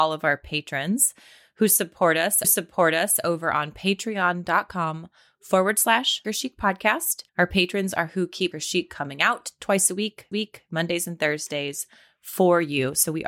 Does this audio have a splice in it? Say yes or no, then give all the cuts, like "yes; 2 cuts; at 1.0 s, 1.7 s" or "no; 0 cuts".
yes; 5 cuts; at 2.4 s, 6.2 s, 7.3 s, 8.5 s, 10.3 s